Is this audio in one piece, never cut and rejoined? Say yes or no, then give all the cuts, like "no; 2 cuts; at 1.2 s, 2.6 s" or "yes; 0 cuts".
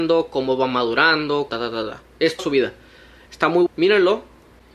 no; 3 cuts; at 1.5 s, 2.4 s, 3.7 s